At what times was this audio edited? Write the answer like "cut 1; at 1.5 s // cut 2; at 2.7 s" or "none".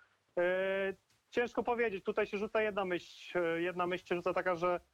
none